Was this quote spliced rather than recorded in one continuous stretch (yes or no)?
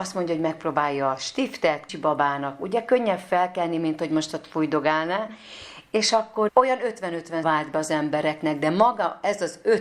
yes